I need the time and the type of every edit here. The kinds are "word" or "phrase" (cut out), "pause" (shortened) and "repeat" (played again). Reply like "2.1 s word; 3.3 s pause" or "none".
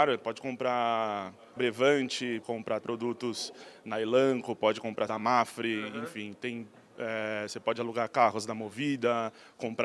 1.6 s word; 2.4 s word; 2.8 s word; 5.1 s word